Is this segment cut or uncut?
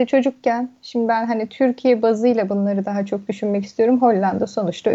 uncut